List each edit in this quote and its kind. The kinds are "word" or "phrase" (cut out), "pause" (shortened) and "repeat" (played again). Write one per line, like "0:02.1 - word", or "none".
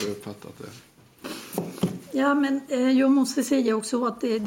none